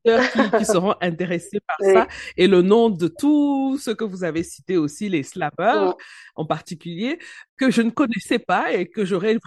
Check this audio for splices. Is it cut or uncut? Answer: uncut